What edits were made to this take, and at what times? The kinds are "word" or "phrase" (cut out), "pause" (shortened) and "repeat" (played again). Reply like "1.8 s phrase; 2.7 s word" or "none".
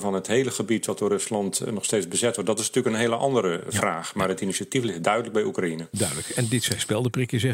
none